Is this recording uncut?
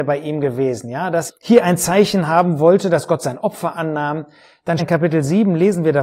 no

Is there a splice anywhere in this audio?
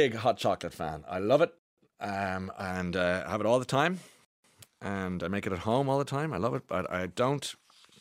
no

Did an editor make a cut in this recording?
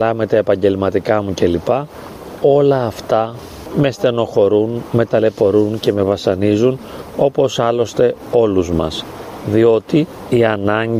no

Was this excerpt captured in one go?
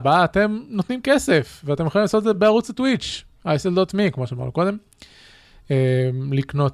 yes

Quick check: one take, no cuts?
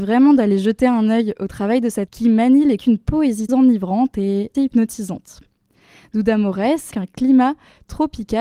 no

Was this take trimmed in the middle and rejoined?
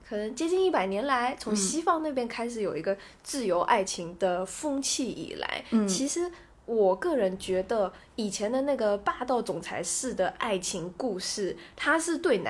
no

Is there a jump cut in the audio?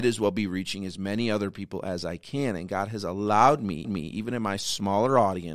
yes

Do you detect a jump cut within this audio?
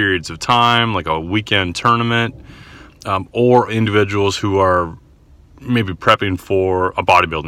no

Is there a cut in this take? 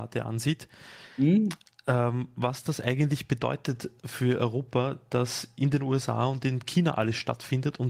no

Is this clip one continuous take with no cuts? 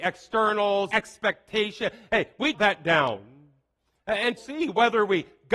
no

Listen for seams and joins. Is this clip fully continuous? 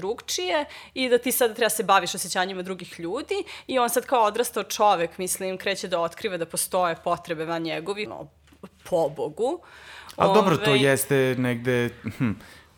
no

